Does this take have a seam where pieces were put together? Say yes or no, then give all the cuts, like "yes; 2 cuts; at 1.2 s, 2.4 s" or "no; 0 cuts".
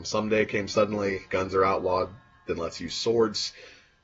yes; 1 cut; at 1.3 s